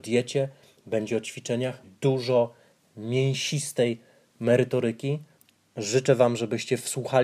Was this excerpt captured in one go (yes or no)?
no